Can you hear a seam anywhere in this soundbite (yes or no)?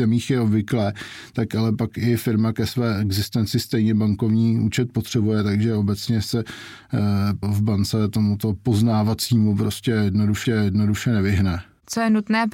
yes